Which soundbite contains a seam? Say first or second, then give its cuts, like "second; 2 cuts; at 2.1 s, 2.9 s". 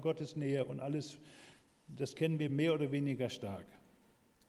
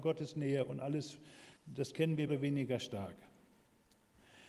second; 2 cuts; at 1.6 s, 2.3 s